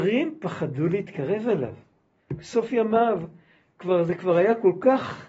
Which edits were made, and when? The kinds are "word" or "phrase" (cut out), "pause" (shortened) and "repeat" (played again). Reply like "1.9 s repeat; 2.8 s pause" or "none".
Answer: none